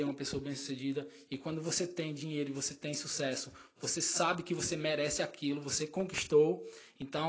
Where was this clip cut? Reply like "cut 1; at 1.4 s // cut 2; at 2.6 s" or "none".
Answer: none